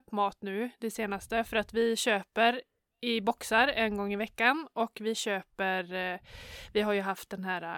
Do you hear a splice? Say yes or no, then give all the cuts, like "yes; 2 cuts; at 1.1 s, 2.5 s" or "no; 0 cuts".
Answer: no; 0 cuts